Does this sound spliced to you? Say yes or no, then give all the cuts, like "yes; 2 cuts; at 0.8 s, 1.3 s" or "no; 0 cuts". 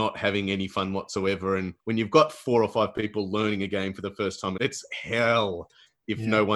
yes; 2 cuts; at 1.8 s, 4.6 s